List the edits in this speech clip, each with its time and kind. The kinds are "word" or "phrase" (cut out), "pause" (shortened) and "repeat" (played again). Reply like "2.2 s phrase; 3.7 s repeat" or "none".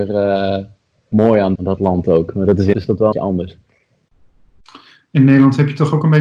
1.6 s word; 2.7 s word; 3.1 s word